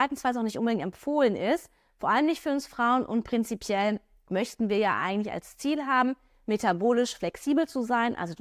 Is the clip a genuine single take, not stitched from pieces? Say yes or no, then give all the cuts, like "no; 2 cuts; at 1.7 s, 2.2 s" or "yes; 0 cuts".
yes; 0 cuts